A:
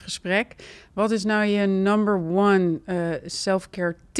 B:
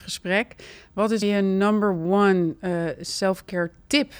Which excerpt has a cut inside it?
B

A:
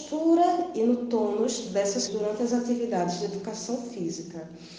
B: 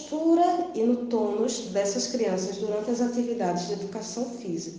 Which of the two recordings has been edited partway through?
A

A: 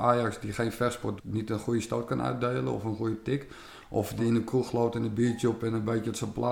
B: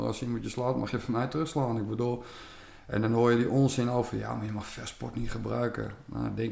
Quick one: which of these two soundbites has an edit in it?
A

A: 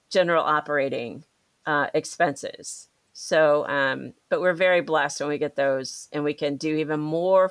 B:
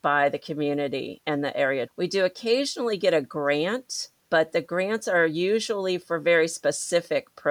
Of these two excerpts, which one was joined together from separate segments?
B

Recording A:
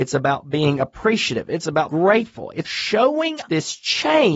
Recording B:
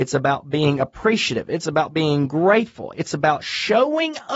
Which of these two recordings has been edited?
A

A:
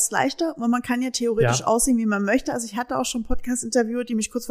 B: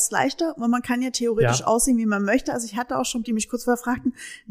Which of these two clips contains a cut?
B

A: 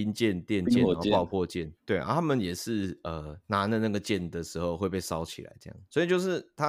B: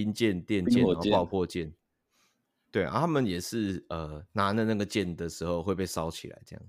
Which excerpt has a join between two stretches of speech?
A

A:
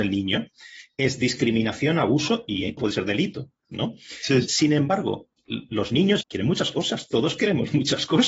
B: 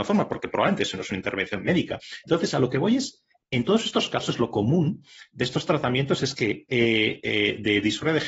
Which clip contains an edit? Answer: A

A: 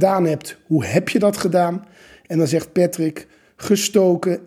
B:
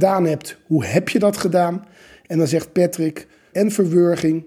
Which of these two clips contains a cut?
B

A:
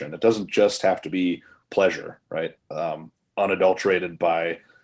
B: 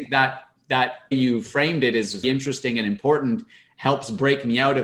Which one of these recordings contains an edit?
B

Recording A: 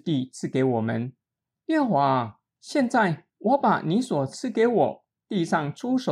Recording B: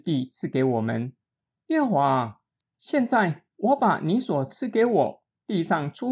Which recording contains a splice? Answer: A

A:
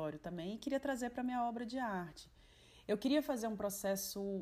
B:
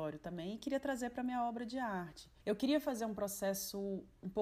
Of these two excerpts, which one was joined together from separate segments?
B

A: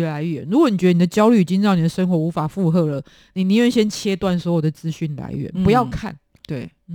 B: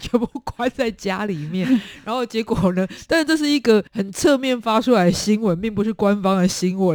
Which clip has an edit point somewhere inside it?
B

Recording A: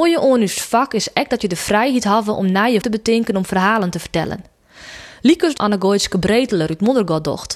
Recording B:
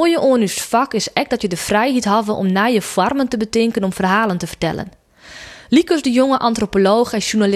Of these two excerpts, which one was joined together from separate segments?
A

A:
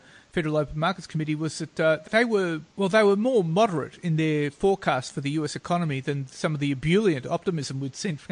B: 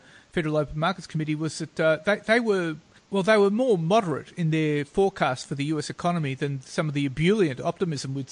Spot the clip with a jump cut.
A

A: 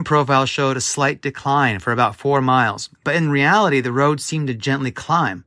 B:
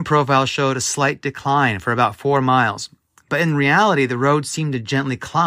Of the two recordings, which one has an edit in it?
A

